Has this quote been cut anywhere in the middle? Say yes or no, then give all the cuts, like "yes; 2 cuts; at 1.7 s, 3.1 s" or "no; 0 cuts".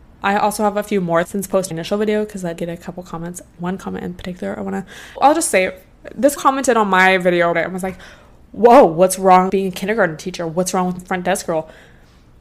yes; 8 cuts; at 1.2 s, 1.7 s, 2.6 s, 5.2 s, 6.4 s, 7.5 s, 9.5 s, 11.0 s